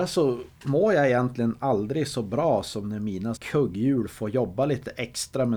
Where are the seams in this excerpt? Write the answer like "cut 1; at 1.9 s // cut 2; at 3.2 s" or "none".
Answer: cut 1; at 3.4 s

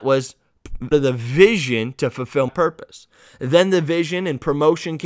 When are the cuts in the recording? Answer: cut 1; at 0.9 s // cut 2; at 2.5 s

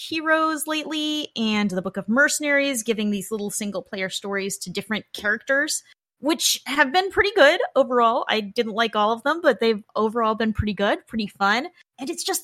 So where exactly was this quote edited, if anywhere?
none

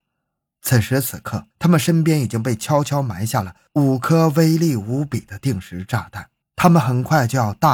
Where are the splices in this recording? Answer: cut 1; at 1.5 s // cut 2; at 6.4 s

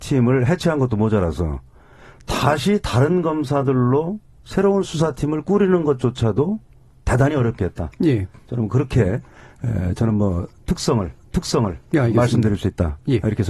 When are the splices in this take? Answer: cut 1; at 11.2 s

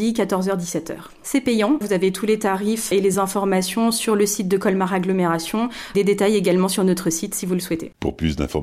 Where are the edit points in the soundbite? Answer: none

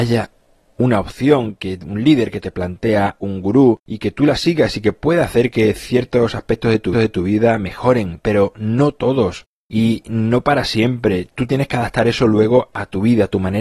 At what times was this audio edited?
cut 1; at 1.6 s // cut 2; at 3.2 s // cut 3; at 3.8 s // cut 4; at 6.9 s

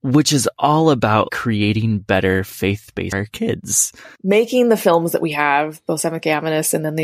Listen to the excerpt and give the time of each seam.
cut 1; at 1.3 s // cut 2; at 3.1 s // cut 3; at 4.2 s

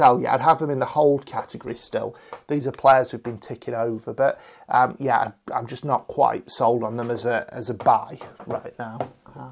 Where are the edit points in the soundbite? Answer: none

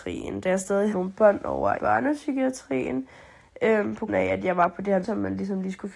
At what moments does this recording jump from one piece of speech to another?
cut 1; at 0.9 s // cut 2; at 1.8 s // cut 3; at 4.1 s // cut 4; at 5.0 s

